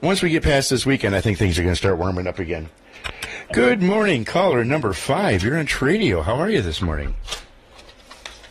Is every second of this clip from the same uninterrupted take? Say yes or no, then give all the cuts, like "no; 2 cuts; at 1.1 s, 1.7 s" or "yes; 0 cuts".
yes; 0 cuts